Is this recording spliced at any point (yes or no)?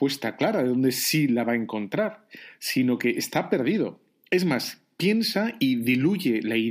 no